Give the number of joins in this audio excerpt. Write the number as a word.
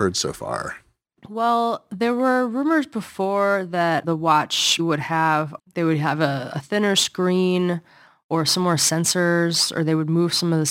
three